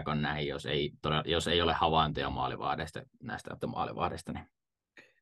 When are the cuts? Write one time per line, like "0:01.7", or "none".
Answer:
0:03.6